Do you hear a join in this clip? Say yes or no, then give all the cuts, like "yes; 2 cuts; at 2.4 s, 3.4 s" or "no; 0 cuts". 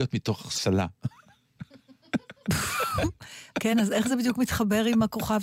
no; 0 cuts